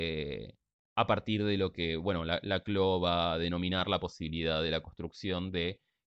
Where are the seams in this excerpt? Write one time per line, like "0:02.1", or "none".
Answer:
none

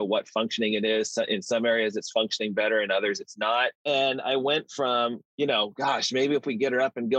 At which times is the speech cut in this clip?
0:03.7
0:05.3

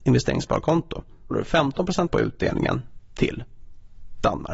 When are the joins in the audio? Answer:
0:01.3
0:02.1

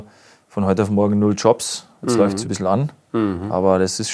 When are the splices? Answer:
0:02.4

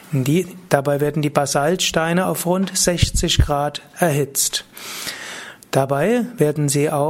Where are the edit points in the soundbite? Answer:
none

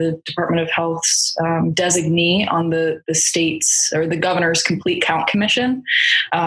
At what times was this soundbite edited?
none

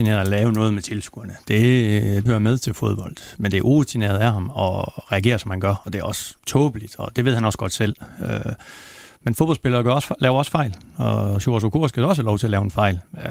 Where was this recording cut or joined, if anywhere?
0:02.3
0:06.4

